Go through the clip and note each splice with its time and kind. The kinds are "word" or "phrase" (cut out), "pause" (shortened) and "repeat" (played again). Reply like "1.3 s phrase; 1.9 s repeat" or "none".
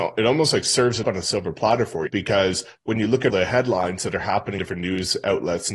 1.0 s word; 2.1 s word; 3.3 s word; 4.6 s word